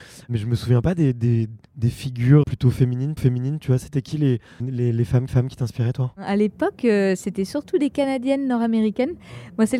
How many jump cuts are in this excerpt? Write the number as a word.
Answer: five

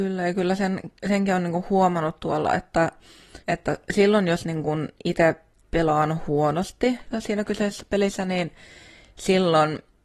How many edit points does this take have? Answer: two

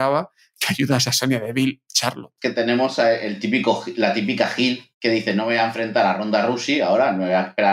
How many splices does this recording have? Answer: two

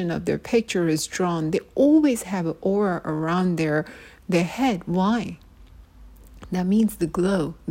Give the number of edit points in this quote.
zero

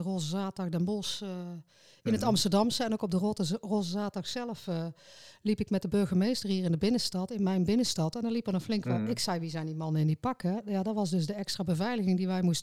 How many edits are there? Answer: zero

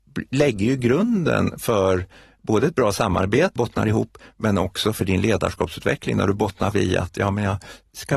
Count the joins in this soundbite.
two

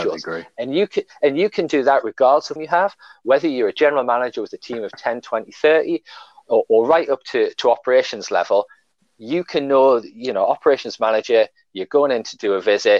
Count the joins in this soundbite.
one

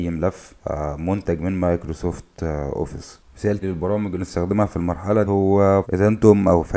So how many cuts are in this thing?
four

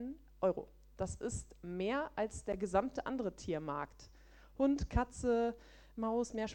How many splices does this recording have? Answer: zero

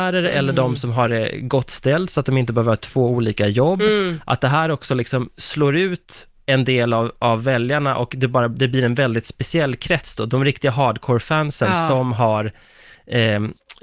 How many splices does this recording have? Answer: zero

